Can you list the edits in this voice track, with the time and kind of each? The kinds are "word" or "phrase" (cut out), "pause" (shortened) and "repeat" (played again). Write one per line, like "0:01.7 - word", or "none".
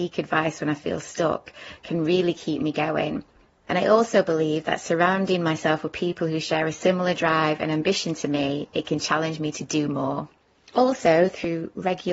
none